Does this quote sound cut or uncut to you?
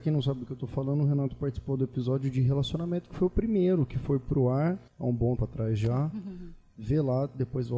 cut